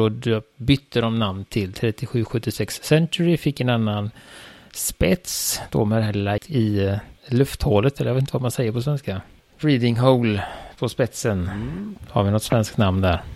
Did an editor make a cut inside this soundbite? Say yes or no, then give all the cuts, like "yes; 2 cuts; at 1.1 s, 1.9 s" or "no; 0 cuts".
yes; 3 cuts; at 6.4 s, 7.2 s, 9.4 s